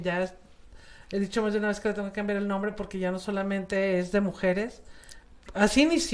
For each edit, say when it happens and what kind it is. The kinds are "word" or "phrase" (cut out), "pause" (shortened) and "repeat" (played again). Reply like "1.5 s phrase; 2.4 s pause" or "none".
none